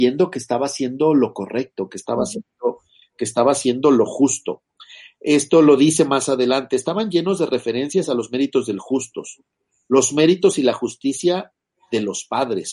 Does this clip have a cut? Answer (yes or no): no